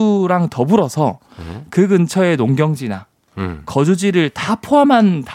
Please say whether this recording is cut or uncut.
uncut